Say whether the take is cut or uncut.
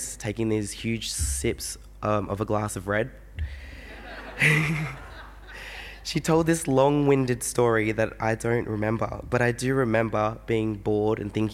uncut